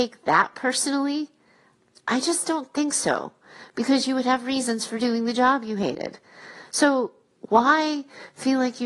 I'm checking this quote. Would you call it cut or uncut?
uncut